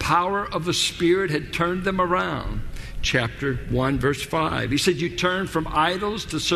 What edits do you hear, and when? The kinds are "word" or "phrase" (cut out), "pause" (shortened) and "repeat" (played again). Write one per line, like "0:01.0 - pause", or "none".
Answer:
none